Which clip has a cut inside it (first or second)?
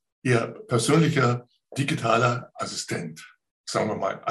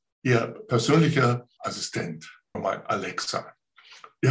second